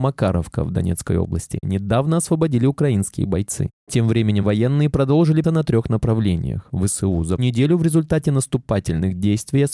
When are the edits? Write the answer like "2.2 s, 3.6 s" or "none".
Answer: 1.6 s, 4.4 s, 5.4 s, 7.4 s